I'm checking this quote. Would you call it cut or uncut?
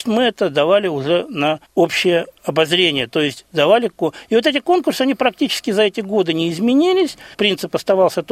cut